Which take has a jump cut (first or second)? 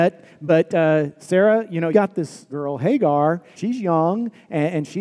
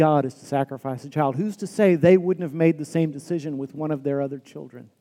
first